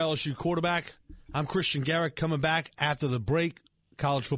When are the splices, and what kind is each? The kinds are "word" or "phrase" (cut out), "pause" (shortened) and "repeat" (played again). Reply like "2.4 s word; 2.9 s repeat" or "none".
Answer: none